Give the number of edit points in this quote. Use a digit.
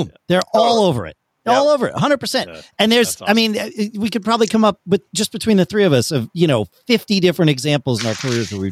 0